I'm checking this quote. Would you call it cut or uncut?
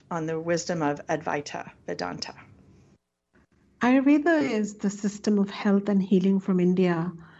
uncut